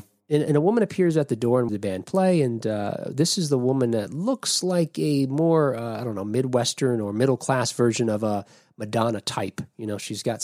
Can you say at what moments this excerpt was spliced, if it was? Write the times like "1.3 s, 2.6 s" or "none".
1.7 s

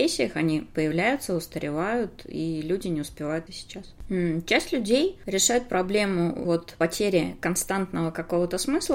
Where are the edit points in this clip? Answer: 3.5 s, 6.4 s

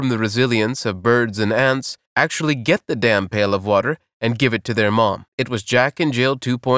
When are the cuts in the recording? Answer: 2.1 s, 5.3 s

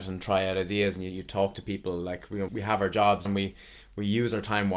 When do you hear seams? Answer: 2.5 s, 3.2 s

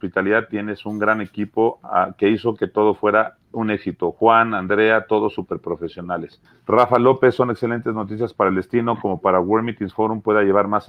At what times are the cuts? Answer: 6.4 s

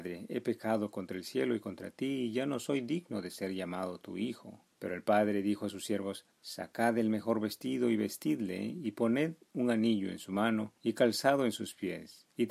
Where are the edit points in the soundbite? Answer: 4.7 s, 6.3 s, 10.8 s

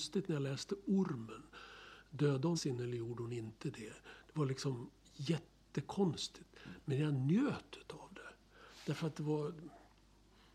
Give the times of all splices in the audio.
2.5 s

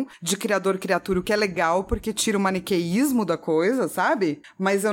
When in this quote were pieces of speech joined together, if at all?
none

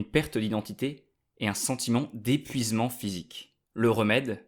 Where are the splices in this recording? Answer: none

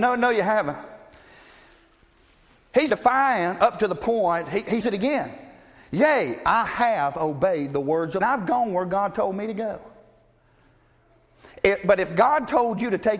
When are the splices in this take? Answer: 2.9 s, 4.8 s, 8.2 s

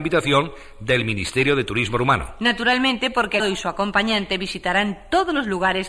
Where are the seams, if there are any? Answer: 3.4 s

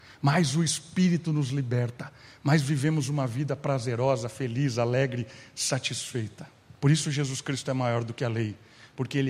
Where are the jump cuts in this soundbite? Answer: 6.7 s

